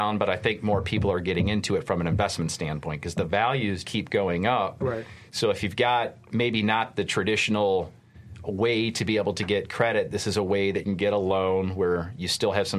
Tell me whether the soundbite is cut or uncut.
cut